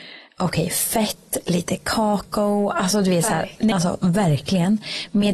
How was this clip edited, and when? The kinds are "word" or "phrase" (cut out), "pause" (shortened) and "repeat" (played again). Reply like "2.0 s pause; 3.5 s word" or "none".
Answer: 3.7 s word